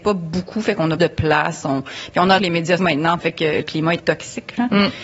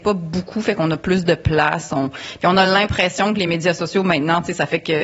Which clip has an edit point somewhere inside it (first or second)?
first